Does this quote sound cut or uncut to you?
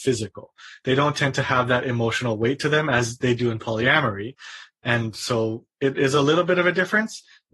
uncut